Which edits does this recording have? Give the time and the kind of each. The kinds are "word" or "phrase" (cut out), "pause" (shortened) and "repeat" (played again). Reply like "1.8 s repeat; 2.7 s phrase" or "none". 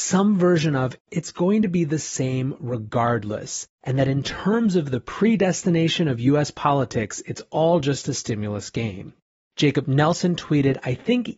none